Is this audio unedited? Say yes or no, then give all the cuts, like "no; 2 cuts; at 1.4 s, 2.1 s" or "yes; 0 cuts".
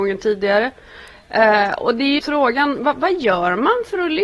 no; 1 cut; at 2.2 s